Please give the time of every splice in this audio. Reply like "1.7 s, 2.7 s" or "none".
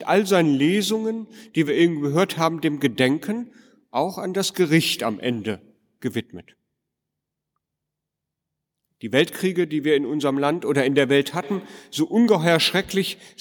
none